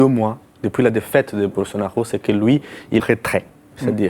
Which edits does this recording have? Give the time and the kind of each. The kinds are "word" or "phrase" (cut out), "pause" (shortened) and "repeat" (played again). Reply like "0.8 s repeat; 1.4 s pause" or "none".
2.2 s word; 3.0 s phrase

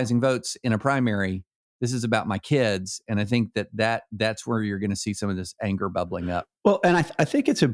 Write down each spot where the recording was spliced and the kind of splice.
none

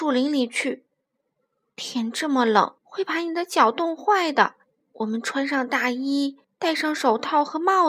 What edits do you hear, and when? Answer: 2.8 s pause; 4.8 s pause; 6.4 s pause

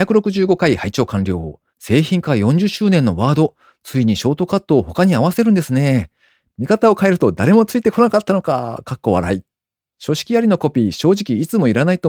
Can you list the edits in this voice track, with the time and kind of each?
1.7 s pause

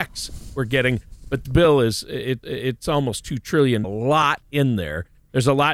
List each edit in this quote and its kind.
1.4 s word; 2.4 s repeat; 3.8 s phrase

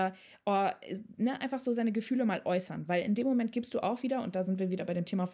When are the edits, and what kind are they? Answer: none

